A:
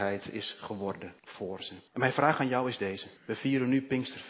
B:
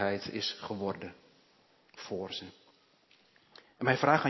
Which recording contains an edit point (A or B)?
A